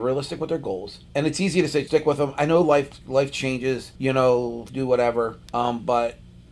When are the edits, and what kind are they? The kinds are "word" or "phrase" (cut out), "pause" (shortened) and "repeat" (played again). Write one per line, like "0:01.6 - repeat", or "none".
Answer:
0:01.0 - pause
0:01.9 - word
0:03.0 - word
0:04.0 - pause
0:04.7 - word
0:05.4 - pause